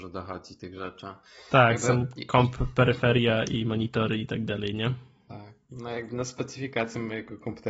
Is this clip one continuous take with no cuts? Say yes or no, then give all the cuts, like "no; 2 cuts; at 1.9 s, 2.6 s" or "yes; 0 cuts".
yes; 0 cuts